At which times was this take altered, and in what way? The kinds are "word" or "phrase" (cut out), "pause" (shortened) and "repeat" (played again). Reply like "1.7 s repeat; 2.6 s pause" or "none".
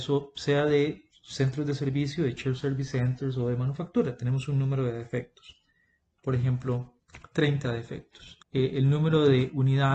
8.4 s pause